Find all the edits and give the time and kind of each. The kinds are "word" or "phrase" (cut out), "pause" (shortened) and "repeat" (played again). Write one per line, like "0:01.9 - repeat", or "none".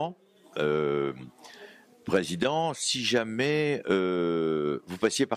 none